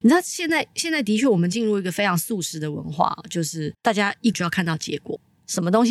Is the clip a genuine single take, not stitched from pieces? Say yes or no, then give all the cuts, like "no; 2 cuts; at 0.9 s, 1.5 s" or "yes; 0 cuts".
no; 2 cuts; at 3.8 s, 4.3 s